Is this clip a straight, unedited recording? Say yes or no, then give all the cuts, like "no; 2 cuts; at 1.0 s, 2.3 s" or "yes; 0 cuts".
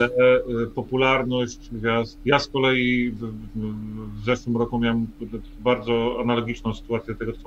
yes; 0 cuts